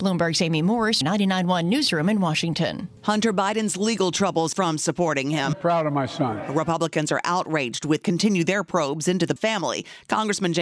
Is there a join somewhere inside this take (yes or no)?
yes